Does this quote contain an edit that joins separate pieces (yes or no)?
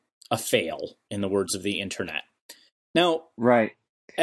no